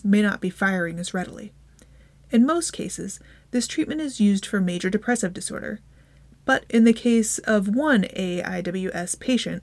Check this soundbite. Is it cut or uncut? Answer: uncut